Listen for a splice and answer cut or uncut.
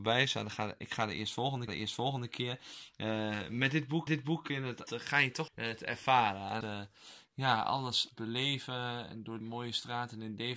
cut